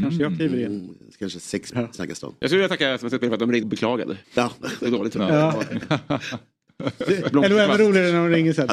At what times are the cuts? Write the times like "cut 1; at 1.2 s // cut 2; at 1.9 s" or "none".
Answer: cut 1; at 1.7 s // cut 2; at 3.6 s // cut 3; at 4.2 s // cut 4; at 4.8 s